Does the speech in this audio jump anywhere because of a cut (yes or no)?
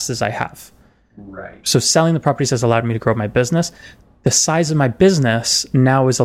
no